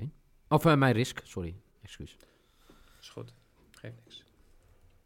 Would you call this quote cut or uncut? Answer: uncut